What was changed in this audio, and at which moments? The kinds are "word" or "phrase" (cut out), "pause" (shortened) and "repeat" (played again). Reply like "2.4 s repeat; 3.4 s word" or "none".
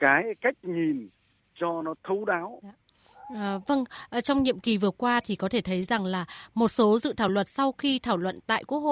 none

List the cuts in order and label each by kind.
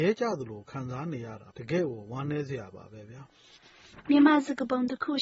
1.5 s pause

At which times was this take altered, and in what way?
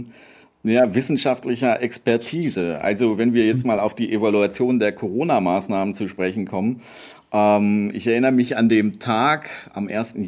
none

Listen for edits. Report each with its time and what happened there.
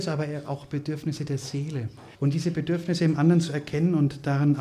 2.1 s pause

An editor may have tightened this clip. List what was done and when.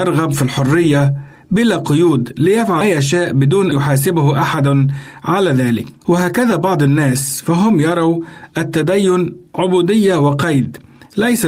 2.8 s word; 3.7 s word; 6.0 s pause; 9.5 s pause

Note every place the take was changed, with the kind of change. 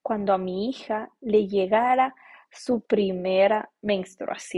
none

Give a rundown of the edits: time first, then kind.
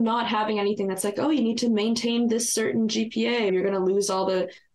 3.5 s word

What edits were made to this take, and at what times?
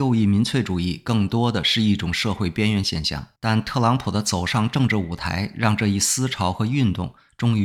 3.4 s pause

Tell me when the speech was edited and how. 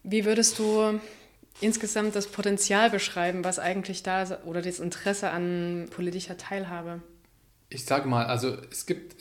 none

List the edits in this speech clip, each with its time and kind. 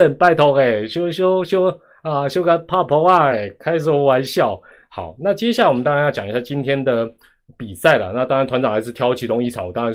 none

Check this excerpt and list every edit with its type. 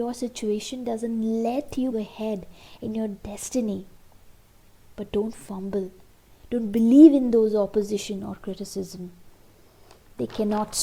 1.9 s word

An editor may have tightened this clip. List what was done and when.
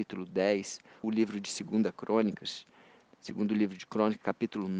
1.0 s word

